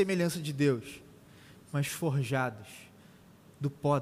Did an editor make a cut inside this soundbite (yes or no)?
yes